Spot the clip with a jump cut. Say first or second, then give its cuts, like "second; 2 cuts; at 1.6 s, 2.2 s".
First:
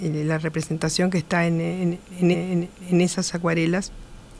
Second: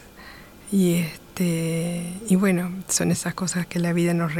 first; 1 cut; at 2.3 s